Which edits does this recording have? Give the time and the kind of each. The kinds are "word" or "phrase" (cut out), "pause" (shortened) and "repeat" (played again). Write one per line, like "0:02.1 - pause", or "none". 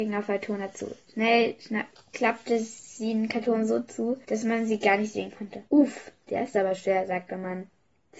0:01.0 - pause
0:02.0 - pause
0:04.2 - pause
0:05.7 - pause